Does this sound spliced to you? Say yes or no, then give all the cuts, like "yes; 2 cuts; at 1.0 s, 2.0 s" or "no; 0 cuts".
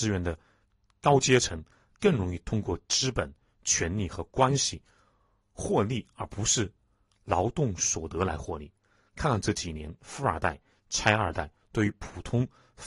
no; 0 cuts